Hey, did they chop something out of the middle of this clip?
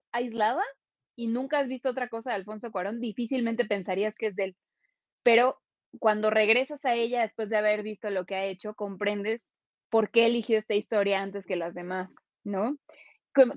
no; 0 cuts

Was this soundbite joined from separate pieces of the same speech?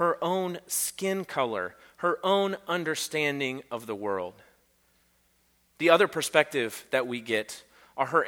no; 0 cuts

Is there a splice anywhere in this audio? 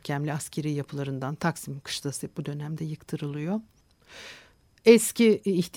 no; 0 cuts

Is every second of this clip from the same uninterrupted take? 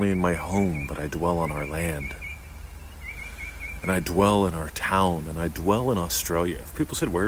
yes; 0 cuts

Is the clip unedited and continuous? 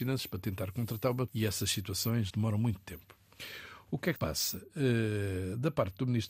no; 3 cuts; at 1.3 s, 2.3 s, 4.2 s

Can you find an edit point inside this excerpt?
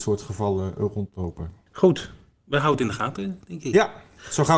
no; 0 cuts

